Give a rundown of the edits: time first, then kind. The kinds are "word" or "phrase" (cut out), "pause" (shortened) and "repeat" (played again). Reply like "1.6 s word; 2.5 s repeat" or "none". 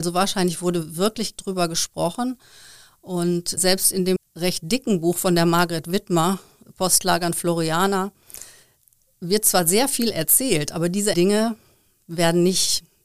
1.4 s word; 3.6 s word; 4.2 s word; 11.1 s word